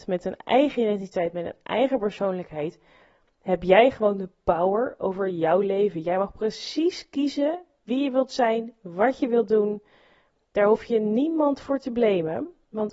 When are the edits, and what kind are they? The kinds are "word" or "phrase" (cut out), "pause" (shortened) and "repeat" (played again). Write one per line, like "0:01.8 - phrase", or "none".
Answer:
none